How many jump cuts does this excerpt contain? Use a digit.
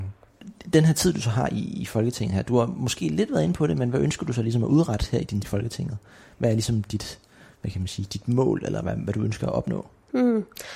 1